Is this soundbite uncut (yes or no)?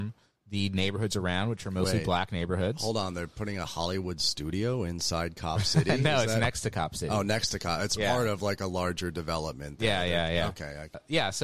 yes